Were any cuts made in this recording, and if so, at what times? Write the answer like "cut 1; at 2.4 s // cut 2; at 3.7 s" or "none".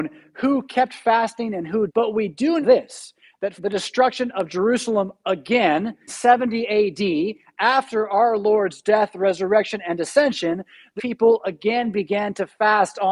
cut 1; at 1.9 s // cut 2; at 2.6 s // cut 3; at 3.6 s // cut 4; at 6.1 s // cut 5; at 11.0 s